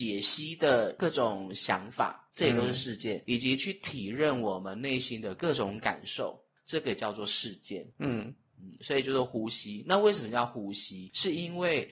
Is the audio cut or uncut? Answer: cut